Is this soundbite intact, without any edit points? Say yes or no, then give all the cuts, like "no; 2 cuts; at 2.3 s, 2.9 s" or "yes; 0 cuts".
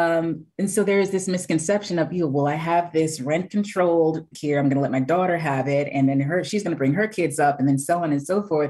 no; 1 cut; at 4.3 s